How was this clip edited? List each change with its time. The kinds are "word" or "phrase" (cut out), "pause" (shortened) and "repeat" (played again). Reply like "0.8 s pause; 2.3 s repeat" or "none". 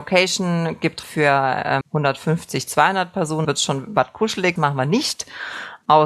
1.0 s word; 1.8 s word; 3.4 s word; 4.6 s word